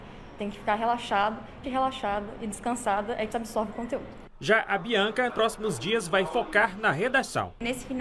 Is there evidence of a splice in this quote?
yes; 3 cuts; at 1.6 s, 3.3 s, 5.3 s

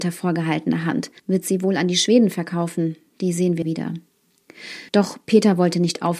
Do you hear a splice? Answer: yes; 3 cuts; at 1.2 s, 3.6 s, 4.9 s

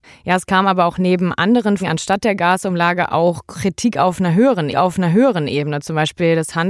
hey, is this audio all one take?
no; 2 cuts; at 1.8 s, 4.7 s

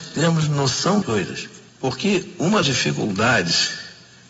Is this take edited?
yes; 3 cuts; at 1.0 s, 1.7 s, 2.6 s

